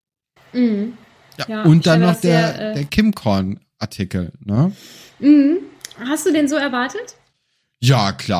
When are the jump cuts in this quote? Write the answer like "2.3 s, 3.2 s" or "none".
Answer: none